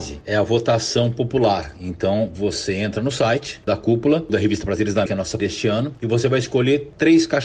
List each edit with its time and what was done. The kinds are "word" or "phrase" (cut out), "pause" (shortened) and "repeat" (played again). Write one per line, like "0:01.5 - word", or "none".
0:04.3 - word
0:05.1 - word
0:05.4 - word